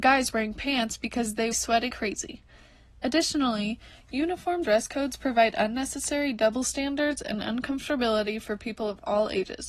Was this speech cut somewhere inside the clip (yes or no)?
yes